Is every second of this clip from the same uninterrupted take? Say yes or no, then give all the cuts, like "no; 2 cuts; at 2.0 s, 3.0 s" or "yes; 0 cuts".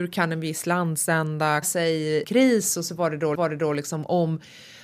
no; 3 cuts; at 1.6 s, 2.2 s, 3.4 s